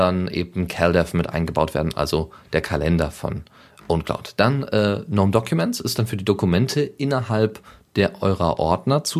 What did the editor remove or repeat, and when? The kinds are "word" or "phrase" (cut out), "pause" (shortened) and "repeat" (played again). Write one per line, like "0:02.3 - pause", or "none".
none